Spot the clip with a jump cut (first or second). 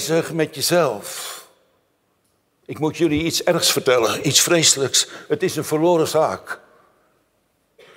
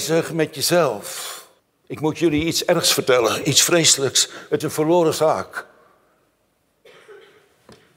second